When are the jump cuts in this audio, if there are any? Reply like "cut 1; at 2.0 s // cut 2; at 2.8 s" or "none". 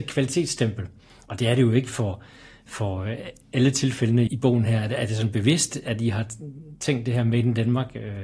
cut 1; at 4.3 s